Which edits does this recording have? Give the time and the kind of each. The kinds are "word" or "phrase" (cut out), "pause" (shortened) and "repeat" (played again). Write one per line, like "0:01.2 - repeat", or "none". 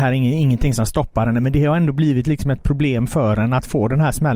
none